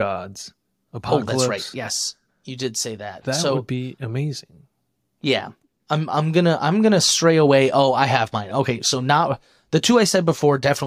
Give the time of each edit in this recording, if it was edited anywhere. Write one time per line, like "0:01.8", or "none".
none